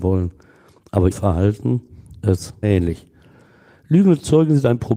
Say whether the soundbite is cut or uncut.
cut